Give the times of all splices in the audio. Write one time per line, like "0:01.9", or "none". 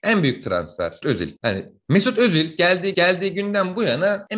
0:01.0
0:02.9